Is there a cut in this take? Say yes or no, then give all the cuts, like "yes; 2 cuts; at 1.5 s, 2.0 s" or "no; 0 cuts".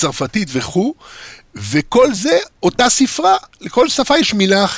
no; 0 cuts